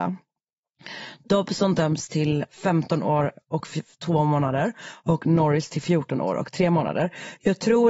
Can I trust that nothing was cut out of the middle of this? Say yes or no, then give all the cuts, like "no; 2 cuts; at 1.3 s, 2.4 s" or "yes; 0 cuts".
no; 1 cut; at 2.5 s